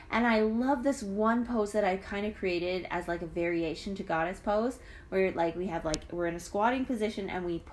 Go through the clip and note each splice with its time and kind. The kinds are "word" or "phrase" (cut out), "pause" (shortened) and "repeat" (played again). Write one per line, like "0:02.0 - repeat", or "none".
none